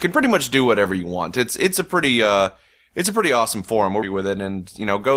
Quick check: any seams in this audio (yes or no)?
yes